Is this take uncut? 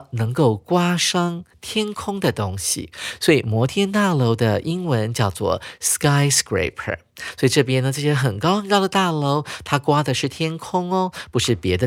yes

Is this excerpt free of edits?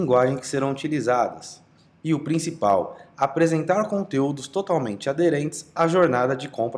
yes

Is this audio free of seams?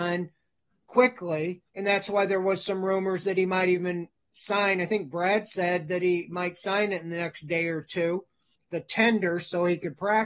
no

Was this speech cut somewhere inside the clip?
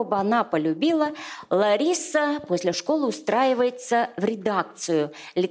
no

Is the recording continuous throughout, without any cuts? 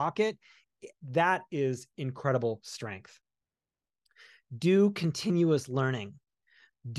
yes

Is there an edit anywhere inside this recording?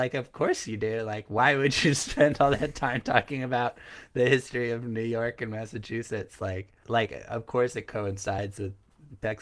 yes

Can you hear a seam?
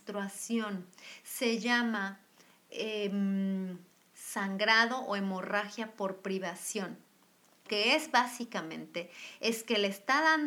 yes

